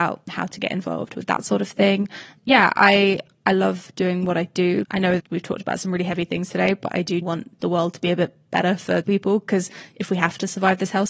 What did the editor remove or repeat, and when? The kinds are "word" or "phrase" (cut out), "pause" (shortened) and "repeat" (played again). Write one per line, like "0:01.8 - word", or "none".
0:02.4 - word
0:04.8 - word
0:05.2 - word
0:07.2 - word
0:07.6 - word
0:09.0 - word